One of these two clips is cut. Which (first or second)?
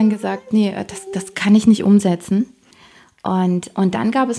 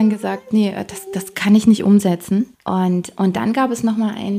second